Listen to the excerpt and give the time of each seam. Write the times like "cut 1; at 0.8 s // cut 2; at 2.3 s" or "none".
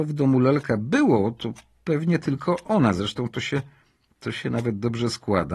none